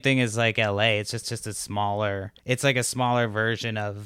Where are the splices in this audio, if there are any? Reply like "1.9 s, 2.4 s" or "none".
1.2 s, 2.4 s